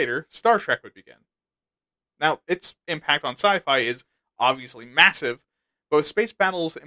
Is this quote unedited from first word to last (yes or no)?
yes